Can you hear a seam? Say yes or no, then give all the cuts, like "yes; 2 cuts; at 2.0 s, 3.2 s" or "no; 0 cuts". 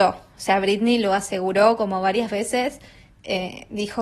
no; 0 cuts